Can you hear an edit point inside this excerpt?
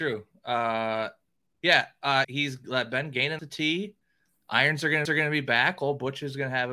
yes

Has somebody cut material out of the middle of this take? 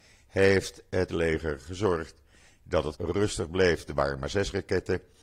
yes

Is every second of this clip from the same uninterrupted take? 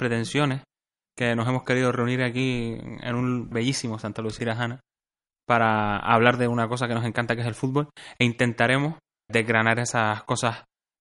no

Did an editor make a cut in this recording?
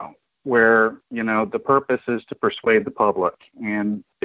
yes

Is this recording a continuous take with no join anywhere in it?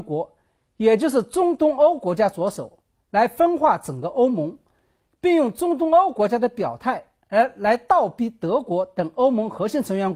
yes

